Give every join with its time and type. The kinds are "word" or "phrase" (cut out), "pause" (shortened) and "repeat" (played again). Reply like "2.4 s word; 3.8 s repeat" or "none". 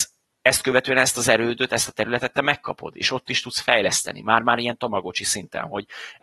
none